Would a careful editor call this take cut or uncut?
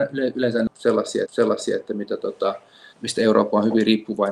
cut